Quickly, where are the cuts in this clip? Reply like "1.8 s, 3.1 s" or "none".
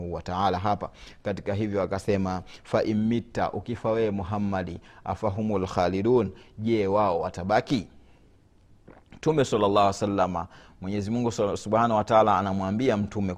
none